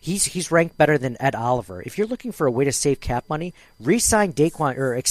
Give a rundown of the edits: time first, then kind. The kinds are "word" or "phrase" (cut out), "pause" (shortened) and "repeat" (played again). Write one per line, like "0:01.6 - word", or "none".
none